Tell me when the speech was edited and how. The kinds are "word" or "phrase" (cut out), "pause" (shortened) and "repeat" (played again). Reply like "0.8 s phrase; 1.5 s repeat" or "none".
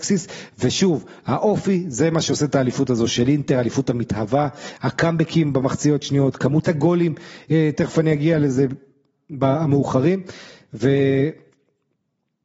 none